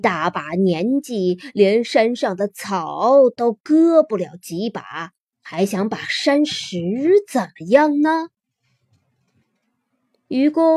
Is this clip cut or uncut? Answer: uncut